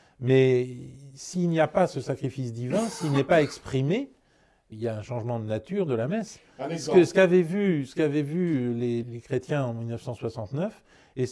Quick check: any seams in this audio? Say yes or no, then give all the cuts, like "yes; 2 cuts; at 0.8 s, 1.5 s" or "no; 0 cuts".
yes; 2 cuts; at 4.7 s, 9.0 s